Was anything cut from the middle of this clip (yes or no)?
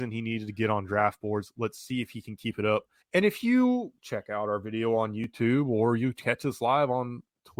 yes